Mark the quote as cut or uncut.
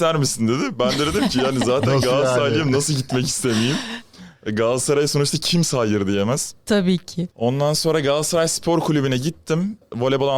uncut